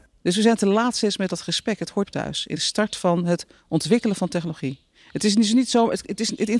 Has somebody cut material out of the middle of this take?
yes; 2 cuts; at 2.0 s, 2.6 s

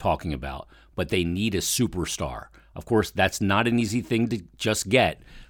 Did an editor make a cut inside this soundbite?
no; 0 cuts

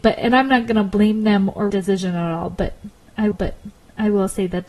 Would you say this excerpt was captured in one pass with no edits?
no; 2 cuts; at 1.7 s, 3.3 s

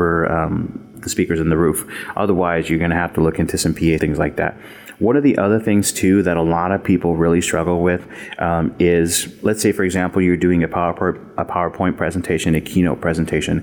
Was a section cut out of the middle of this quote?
yes; 2 cuts; at 0.9 s, 4.0 s

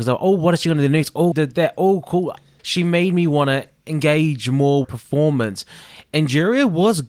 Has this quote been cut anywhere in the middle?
yes; 3 cuts; at 1.3 s, 2.6 s, 4.8 s

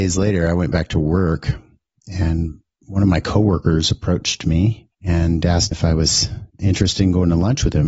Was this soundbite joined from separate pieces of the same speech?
yes; 3 cuts; at 4.9 s, 5.7 s, 6.5 s

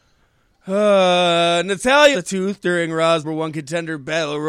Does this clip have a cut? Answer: yes; 2 cuts; at 2.1 s, 3.2 s

